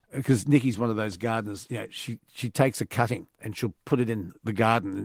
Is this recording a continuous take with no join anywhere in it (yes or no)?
no